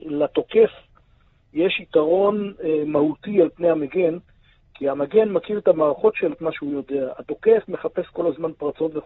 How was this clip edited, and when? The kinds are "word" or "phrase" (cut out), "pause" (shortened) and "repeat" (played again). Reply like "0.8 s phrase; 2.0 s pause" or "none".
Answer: 6.3 s word